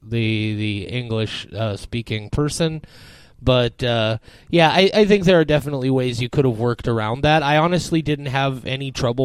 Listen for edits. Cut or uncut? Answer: uncut